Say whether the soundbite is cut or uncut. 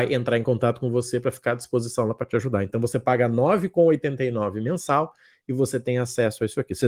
uncut